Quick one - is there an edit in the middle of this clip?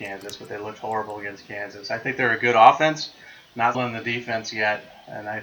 yes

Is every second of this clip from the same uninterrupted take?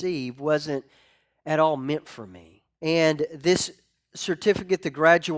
no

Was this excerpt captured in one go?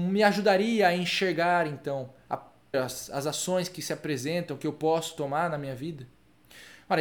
no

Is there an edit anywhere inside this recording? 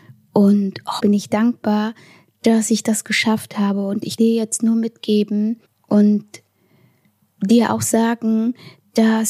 yes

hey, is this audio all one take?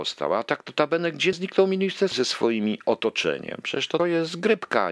no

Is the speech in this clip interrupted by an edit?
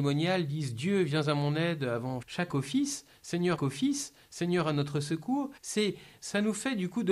yes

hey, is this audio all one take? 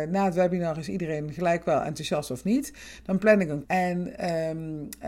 no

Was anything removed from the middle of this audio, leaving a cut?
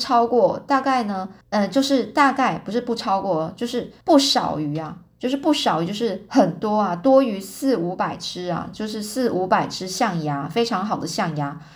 yes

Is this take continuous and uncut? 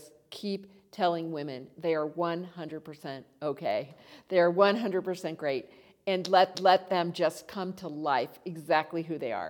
no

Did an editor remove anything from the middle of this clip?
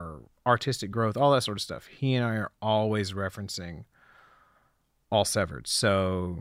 no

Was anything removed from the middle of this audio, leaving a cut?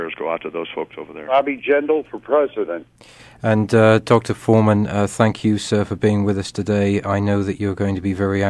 no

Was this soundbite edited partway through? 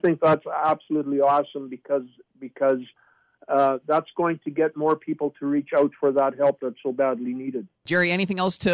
no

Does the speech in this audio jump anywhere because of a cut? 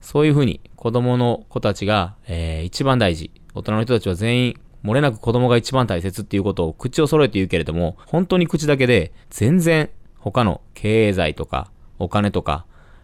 yes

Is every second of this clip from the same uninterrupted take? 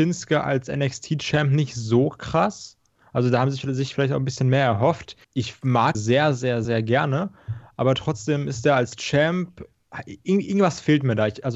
no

